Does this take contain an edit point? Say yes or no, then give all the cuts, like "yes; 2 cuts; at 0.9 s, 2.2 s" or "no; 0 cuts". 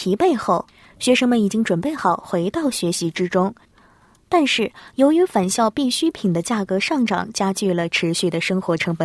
no; 0 cuts